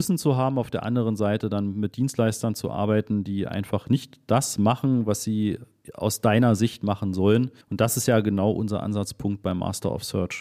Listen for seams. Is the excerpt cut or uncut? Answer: cut